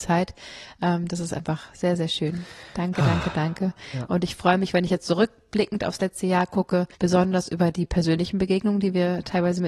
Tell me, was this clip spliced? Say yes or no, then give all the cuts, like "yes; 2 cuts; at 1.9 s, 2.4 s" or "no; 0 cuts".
yes; 1 cut; at 6.9 s